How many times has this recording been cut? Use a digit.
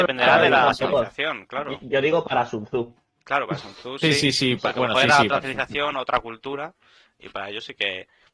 0